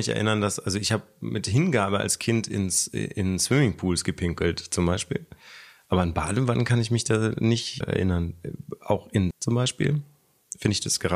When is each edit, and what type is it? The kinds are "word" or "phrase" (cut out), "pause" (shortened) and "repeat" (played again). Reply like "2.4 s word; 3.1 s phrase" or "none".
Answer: 7.8 s word; 9.3 s word